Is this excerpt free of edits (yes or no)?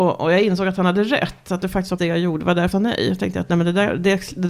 no